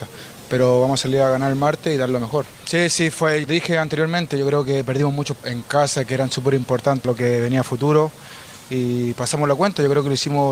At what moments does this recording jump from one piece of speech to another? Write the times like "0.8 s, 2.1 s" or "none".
2.5 s, 3.5 s, 5.4 s, 7.0 s